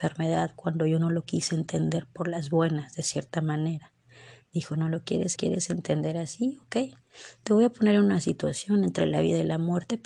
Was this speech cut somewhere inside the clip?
yes; 1 cut; at 5.4 s

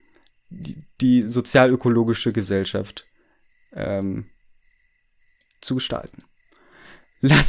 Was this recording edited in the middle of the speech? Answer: no; 0 cuts

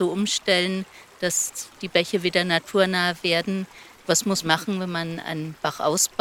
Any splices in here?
yes; 1 cut; at 4.4 s

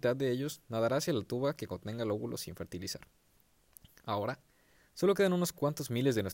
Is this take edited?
no; 0 cuts

